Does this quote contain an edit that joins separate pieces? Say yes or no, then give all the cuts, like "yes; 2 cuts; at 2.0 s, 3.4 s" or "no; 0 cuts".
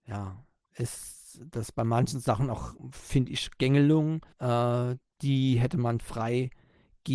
yes; 2 cuts; at 4.3 s, 6.0 s